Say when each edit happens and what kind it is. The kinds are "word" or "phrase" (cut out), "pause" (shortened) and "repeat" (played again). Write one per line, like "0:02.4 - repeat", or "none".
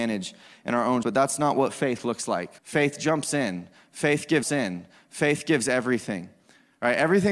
0:01.0 - word
0:02.6 - pause
0:04.4 - repeat